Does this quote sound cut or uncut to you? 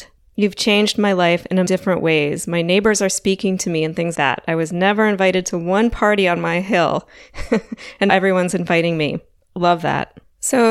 cut